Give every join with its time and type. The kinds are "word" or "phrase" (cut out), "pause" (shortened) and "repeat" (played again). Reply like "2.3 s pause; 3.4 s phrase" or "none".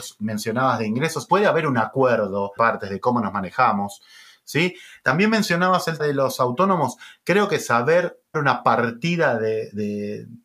1.3 s word; 2.6 s word; 6.0 s word; 8.3 s word

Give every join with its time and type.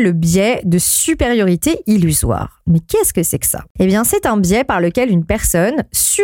3.7 s pause

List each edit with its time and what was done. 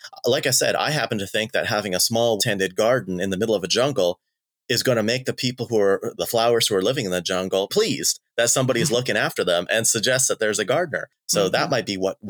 2.4 s word; 6.1 s word; 7.7 s word

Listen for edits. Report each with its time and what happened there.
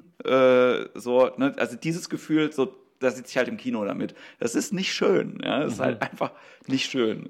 none

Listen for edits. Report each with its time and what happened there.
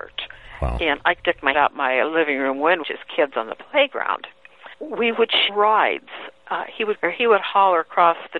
1.2 s pause; 1.5 s word; 2.8 s phrase; 4.7 s pause; 5.5 s word; 7.0 s phrase

